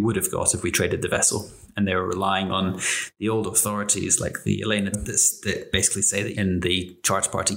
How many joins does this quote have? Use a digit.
2